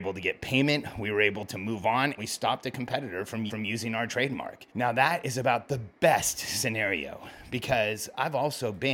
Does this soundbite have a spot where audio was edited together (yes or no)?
yes